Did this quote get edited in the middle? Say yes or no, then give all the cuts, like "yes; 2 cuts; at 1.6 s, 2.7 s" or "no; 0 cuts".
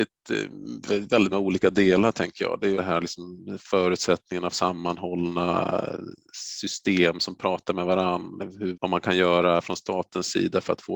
yes; 4 cuts; at 1.3 s, 2.8 s, 4.5 s, 8.7 s